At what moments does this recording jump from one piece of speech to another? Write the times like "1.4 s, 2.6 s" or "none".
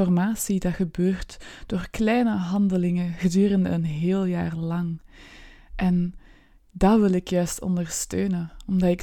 none